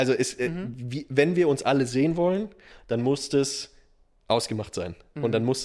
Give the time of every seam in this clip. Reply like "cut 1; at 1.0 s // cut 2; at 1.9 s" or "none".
none